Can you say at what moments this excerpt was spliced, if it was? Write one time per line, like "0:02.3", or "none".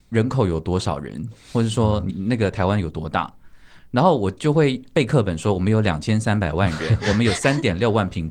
0:02.1